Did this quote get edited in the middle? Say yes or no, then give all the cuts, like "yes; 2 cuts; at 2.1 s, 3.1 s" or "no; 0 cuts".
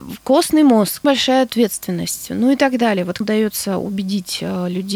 yes; 2 cuts; at 1.0 s, 3.2 s